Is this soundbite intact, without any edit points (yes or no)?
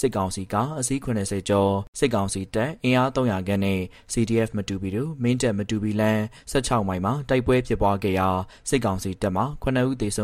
yes